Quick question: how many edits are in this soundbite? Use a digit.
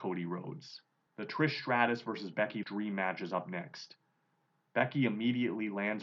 1